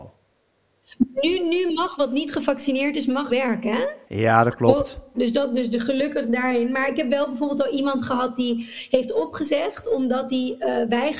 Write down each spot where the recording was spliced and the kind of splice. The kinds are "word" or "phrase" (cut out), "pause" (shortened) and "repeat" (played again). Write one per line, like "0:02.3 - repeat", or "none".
0:02.0 - word
0:03.3 - phrase
0:04.0 - pause
0:05.1 - word